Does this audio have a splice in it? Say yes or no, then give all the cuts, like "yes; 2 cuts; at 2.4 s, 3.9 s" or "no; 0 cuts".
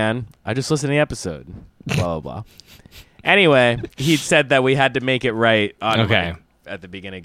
no; 0 cuts